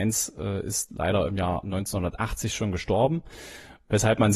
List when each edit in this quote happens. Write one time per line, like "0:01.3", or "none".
none